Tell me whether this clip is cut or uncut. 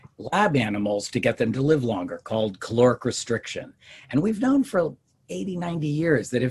uncut